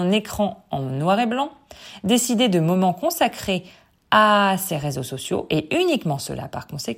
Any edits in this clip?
no; 0 cuts

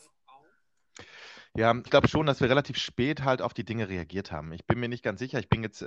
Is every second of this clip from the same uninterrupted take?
no; 1 cut; at 1.9 s

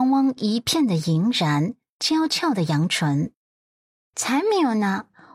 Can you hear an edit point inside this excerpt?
no; 0 cuts

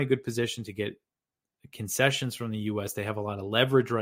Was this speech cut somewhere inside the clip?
no; 0 cuts

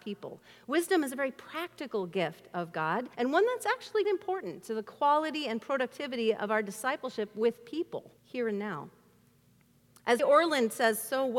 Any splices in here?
yes; 4 cuts; at 3.1 s, 4.0 s, 8.2 s, 10.2 s

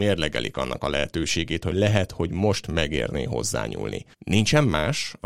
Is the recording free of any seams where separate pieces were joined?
no; 1 cut; at 4.1 s

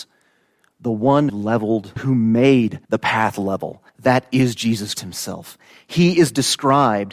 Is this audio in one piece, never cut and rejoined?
no; 5 cuts; at 1.3 s, 2.0 s, 2.8 s, 3.9 s, 4.9 s

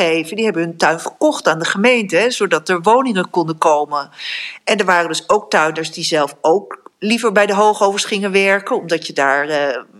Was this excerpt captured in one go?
yes; 0 cuts

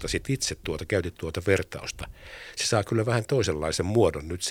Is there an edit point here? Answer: no; 0 cuts

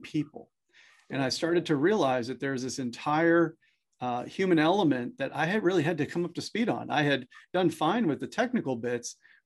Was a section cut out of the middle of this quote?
no; 0 cuts

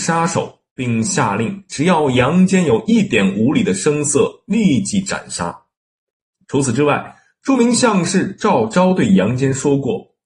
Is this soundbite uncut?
yes; 0 cuts

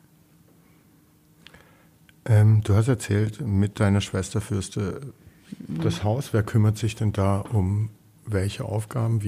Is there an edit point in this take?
no; 0 cuts

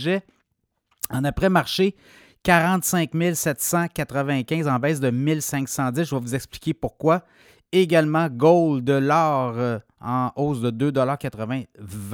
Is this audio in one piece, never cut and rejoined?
yes; 0 cuts

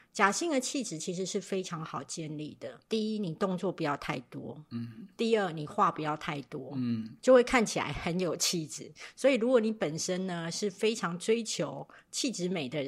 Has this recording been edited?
yes; 1 cut; at 2.8 s

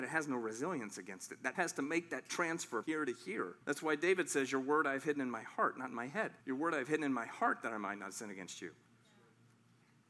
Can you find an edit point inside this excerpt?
yes; 4 cuts; at 1.5 s, 2.8 s, 3.6 s, 6.4 s

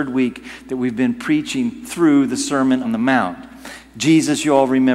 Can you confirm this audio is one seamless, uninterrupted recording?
no; 1 cut; at 2.8 s

